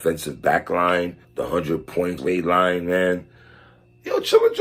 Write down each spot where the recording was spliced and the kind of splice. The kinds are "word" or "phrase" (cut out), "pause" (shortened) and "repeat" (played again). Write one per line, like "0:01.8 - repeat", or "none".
0:01.2 - pause
0:02.2 - word